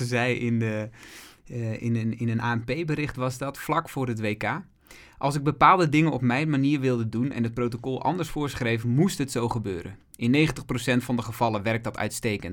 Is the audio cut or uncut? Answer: uncut